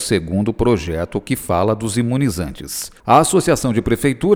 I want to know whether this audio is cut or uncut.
cut